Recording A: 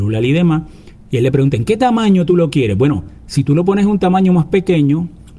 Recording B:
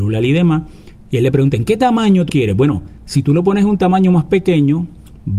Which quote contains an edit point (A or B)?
B